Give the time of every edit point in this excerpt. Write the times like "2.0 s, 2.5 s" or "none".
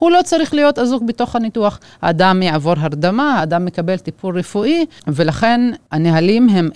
none